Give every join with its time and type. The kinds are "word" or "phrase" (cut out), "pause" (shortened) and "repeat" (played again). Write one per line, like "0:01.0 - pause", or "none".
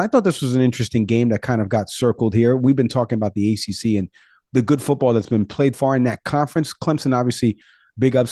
0:05.7 - word

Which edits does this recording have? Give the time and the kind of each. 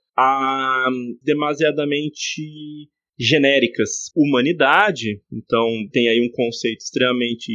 0:01.2 - word
0:04.1 - word
0:05.9 - word

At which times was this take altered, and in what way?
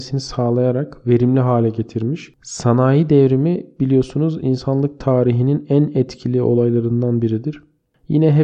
none

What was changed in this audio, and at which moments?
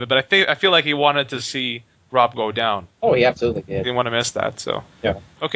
none

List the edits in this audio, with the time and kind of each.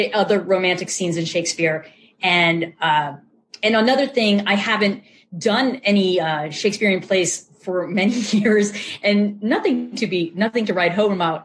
none

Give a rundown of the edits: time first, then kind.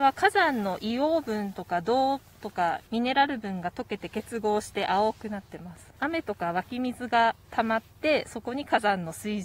0:02.9 - pause
0:05.9 - pause
0:07.4 - pause

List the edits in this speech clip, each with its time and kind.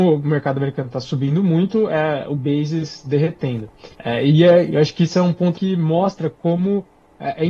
0:03.9 - pause
0:05.5 - phrase

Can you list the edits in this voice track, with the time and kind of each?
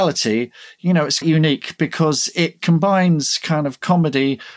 0:01.2 - word

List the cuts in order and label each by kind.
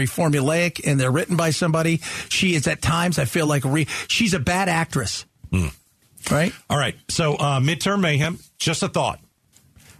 none

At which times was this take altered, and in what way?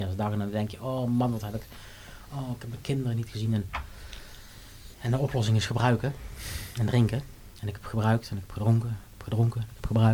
0:04.9 - pause
0:07.6 - pause

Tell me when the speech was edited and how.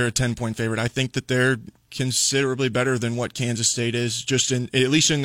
none

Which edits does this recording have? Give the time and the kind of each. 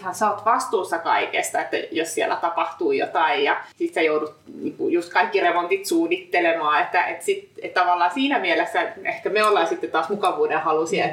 0:03.7 - pause

